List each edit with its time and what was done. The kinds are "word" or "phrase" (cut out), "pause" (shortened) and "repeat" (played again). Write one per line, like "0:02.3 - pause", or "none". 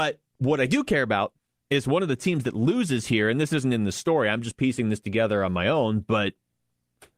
none